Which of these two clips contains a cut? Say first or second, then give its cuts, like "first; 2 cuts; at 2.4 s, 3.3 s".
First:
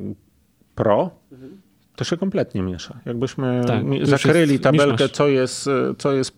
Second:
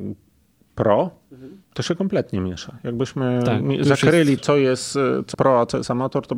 second; 3 cuts; at 1.6 s, 4.4 s, 5.3 s